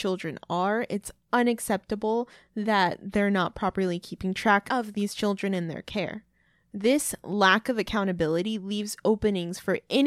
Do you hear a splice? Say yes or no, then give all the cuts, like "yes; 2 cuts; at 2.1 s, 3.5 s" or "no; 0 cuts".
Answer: no; 0 cuts